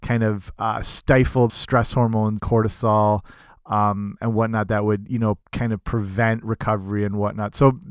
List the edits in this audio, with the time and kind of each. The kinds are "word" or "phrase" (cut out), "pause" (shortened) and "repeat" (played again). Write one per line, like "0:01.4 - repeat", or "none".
0:01.5 - word
0:02.4 - phrase
0:05.4 - pause